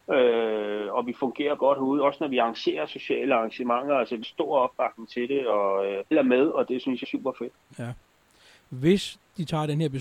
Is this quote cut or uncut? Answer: cut